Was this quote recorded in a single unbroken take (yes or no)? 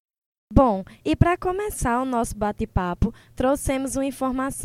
yes